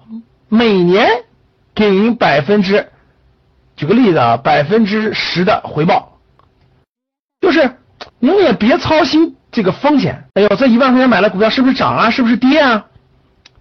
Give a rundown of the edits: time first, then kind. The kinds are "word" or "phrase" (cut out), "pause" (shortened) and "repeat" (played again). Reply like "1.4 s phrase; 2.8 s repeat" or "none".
8.1 s pause; 9.4 s pause; 10.3 s pause